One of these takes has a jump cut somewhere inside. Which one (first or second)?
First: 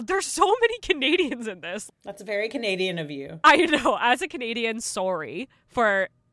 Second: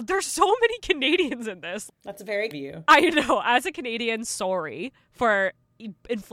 second